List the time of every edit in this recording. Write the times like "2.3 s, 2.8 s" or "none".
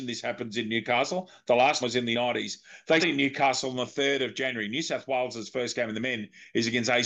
1.8 s, 2.1 s, 3.0 s